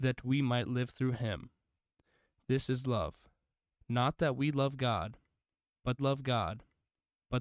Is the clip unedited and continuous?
no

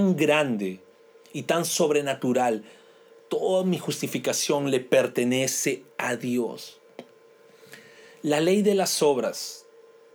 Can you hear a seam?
no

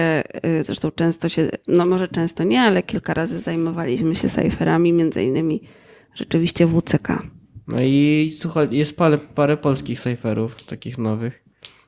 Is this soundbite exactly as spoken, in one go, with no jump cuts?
yes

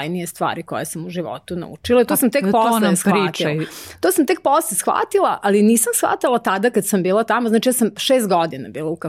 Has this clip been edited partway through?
no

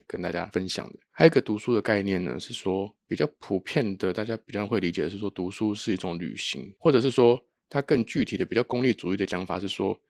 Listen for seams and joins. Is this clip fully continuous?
no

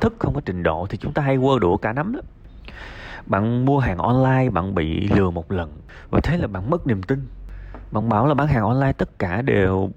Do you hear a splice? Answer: no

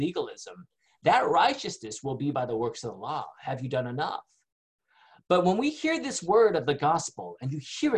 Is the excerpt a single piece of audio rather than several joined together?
yes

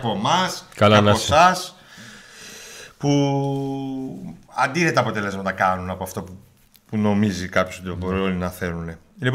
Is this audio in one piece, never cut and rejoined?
yes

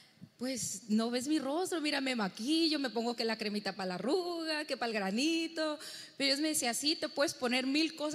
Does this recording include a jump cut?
no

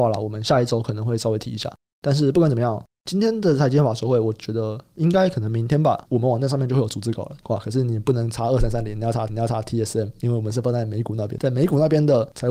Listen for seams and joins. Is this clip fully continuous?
no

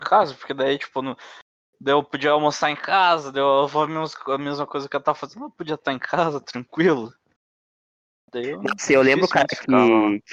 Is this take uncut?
yes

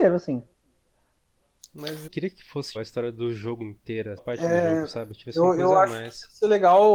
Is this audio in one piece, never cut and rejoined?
no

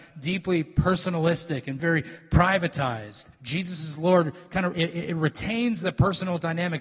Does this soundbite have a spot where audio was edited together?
yes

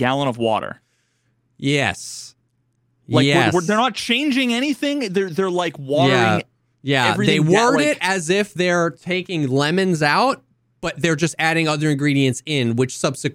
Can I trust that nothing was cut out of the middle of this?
yes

